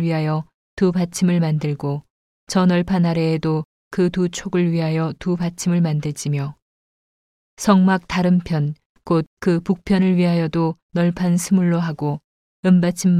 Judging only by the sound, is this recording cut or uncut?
uncut